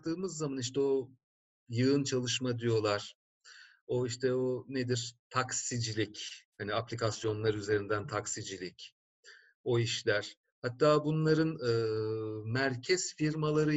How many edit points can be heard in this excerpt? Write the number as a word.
one